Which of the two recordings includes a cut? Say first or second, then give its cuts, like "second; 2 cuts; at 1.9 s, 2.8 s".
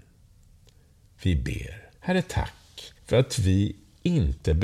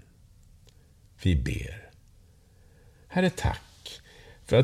first; 2 cuts; at 1.9 s, 3.0 s